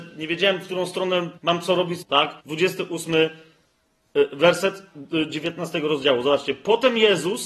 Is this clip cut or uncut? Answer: cut